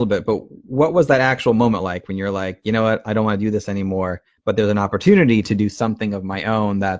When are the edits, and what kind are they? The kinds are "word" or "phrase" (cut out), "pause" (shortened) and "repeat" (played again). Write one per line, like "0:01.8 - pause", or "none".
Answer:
none